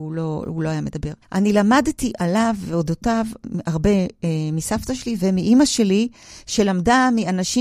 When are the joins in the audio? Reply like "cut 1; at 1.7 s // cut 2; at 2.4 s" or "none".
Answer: cut 1; at 1.2 s